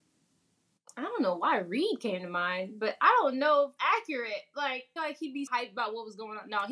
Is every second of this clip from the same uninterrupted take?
no; 3 cuts; at 3.8 s, 5.0 s, 5.5 s

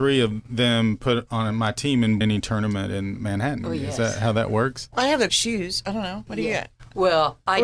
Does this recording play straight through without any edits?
no; 2 cuts; at 2.2 s, 5.3 s

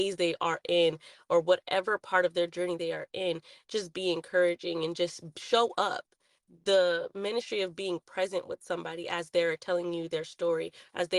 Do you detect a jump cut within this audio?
no; 0 cuts

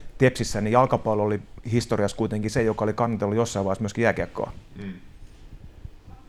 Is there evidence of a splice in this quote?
no; 0 cuts

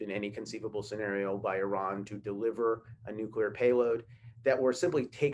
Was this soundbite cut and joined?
no; 0 cuts

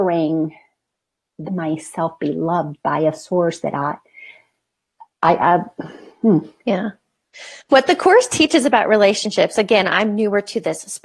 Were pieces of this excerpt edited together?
yes; 4 cuts; at 1.5 s, 5.1 s, 6.1 s, 7.6 s

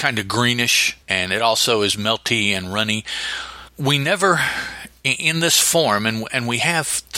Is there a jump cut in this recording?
yes; 2 cuts; at 1.0 s, 3.7 s

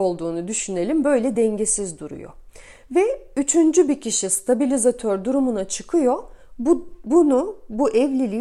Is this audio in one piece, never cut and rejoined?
yes; 0 cuts

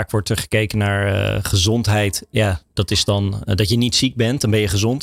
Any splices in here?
no; 0 cuts

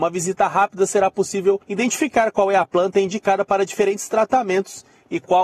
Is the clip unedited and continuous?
no; 1 cut; at 1.6 s

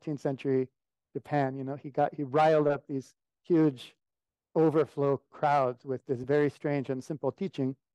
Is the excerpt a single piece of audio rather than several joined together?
yes; 0 cuts

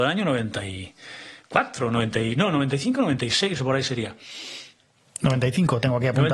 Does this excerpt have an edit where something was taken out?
no; 0 cuts

